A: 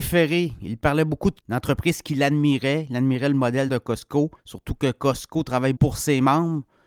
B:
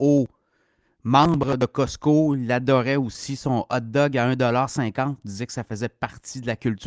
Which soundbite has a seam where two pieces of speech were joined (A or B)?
A